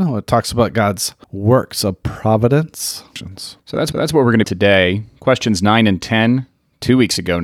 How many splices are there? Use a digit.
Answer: 4